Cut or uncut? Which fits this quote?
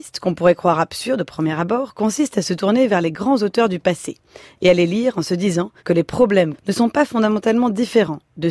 cut